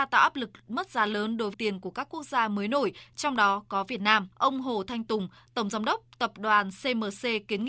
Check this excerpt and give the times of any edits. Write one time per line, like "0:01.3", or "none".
0:01.5
0:04.3